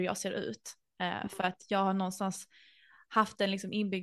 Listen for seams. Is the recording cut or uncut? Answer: uncut